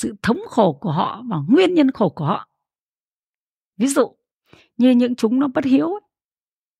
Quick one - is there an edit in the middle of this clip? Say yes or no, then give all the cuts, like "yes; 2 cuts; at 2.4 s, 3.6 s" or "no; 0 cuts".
no; 0 cuts